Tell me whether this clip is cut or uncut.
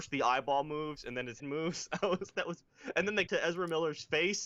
cut